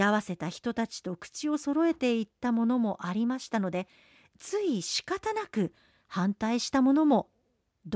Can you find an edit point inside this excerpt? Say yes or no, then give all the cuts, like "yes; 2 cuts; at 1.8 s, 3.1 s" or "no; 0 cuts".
no; 0 cuts